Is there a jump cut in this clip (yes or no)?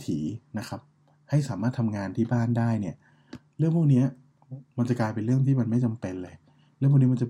no